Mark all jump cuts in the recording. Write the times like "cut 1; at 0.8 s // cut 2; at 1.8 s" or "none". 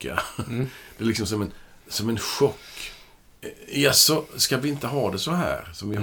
cut 1; at 1.8 s